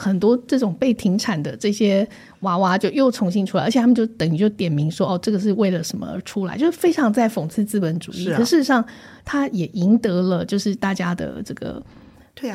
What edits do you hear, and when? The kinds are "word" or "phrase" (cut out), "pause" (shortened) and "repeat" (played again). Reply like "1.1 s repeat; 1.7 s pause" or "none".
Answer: none

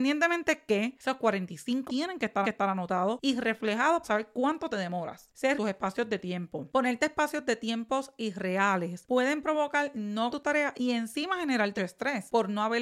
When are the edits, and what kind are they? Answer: 1.9 s word; 2.4 s repeat; 4.0 s word; 4.7 s word; 5.6 s phrase; 10.3 s word; 11.8 s word

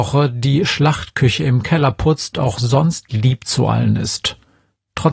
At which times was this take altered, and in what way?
2.3 s word

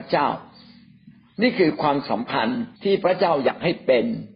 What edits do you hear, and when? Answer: 2.8 s pause

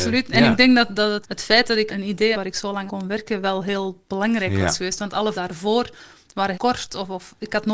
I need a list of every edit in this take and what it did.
1.2 s word; 1.9 s word; 2.3 s word; 2.9 s word; 5.3 s word; 6.5 s word

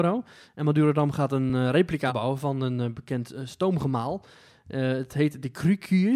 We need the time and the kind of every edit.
none

